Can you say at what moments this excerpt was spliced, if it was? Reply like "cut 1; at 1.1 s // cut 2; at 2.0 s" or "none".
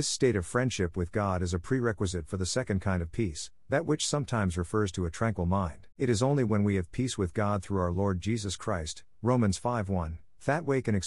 cut 1; at 5.9 s